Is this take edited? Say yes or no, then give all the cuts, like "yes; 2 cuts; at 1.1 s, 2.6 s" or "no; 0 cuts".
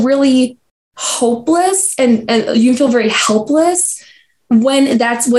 no; 0 cuts